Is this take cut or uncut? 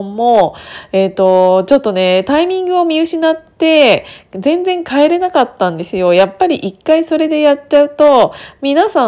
uncut